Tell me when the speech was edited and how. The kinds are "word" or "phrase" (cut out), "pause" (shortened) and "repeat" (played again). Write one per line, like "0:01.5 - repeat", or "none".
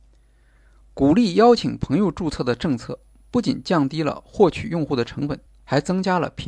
0:05.5 - pause